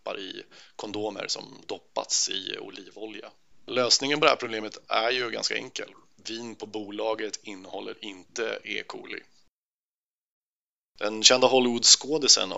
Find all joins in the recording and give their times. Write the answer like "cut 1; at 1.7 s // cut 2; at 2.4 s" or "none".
none